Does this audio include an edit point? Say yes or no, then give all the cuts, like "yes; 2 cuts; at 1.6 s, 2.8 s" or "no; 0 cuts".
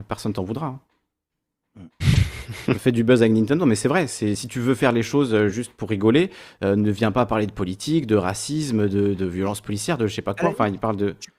no; 0 cuts